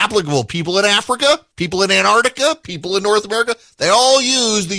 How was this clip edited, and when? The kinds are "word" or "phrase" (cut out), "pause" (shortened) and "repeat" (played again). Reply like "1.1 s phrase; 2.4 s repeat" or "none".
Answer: 1.5 s pause